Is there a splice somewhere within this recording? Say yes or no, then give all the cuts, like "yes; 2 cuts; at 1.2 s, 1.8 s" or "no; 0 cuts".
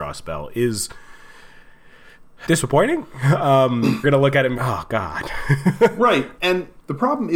yes; 4 cuts; at 2.5 s, 4.0 s, 4.6 s, 6.4 s